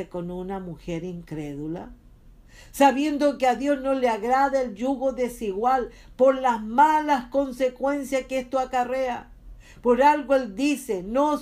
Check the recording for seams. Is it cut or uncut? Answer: uncut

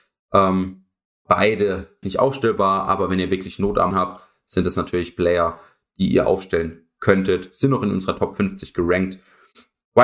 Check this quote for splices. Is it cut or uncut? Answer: cut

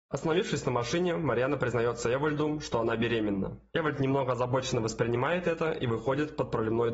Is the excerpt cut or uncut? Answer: uncut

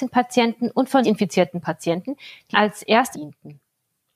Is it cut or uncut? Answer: cut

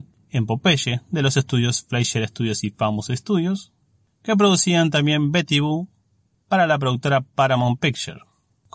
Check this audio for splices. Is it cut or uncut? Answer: uncut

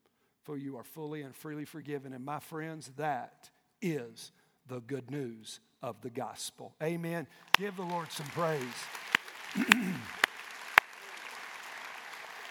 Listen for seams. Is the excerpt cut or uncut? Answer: uncut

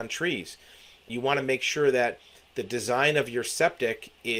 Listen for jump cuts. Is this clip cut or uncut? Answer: uncut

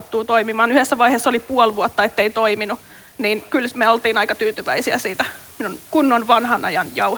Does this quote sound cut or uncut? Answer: uncut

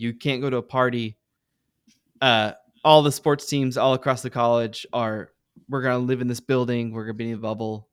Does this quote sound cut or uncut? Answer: uncut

